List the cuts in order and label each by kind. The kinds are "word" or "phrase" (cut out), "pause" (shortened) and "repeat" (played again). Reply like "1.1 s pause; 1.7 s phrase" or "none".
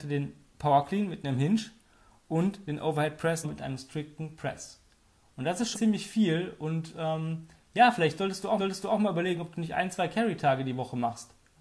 3.4 s word; 5.7 s word; 8.6 s repeat